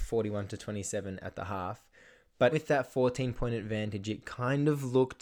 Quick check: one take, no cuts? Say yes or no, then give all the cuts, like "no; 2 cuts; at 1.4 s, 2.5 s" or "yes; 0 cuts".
no; 1 cut; at 2.5 s